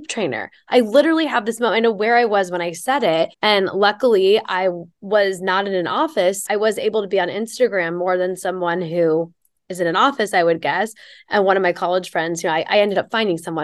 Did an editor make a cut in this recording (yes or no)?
yes